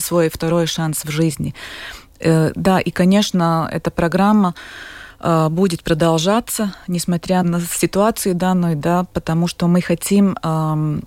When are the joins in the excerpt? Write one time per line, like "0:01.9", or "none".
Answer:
0:07.4